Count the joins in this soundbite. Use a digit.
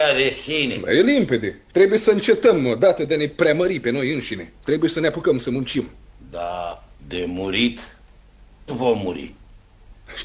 4